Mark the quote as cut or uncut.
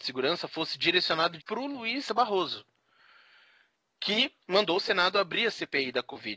cut